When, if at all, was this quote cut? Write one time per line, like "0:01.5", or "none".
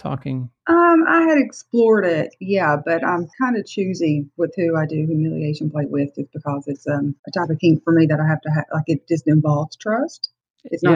0:03.3
0:07.2